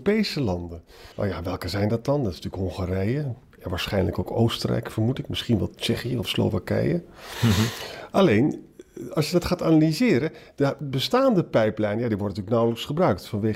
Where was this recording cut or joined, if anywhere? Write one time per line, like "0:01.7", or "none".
0:01.1